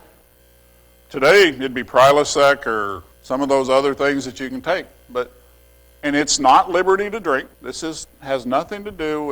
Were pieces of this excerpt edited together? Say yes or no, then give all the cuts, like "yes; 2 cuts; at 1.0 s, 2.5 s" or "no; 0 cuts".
yes; 2 cuts; at 3.1 s, 7.5 s